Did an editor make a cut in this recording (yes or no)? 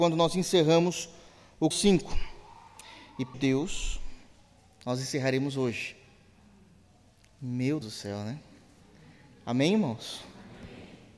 yes